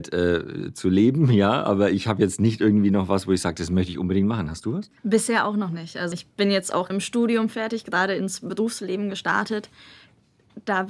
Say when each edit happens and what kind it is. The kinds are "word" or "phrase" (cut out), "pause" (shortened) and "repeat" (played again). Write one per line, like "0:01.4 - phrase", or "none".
0:05.0 - pause
0:06.1 - word
0:06.9 - phrase